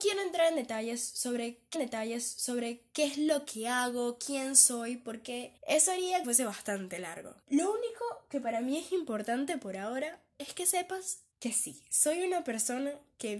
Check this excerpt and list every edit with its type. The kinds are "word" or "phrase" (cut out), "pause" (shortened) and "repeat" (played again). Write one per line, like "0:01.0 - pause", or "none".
0:01.7 - repeat
0:05.6 - pause
0:06.2 - phrase
0:07.4 - pause
0:11.3 - pause